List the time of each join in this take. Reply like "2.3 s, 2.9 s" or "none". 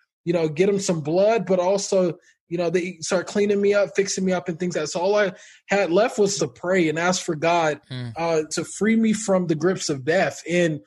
4.7 s, 6.4 s, 8.5 s